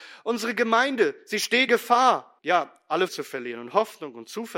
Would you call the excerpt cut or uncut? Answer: cut